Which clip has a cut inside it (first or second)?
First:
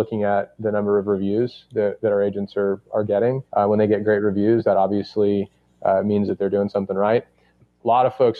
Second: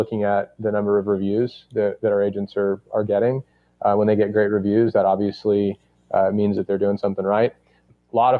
first